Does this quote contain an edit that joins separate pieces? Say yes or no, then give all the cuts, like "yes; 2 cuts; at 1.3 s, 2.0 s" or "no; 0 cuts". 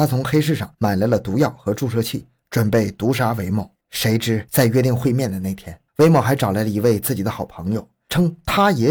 yes; 2 cuts; at 3.8 s, 5.9 s